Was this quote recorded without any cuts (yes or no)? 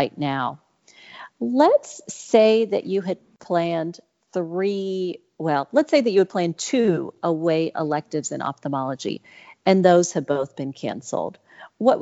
yes